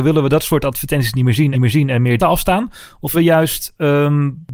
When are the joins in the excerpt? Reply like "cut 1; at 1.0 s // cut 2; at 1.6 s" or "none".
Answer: cut 1; at 1.5 s // cut 2; at 2.2 s // cut 3; at 3.1 s